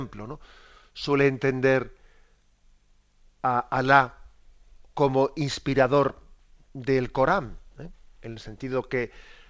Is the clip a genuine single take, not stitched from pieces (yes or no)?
yes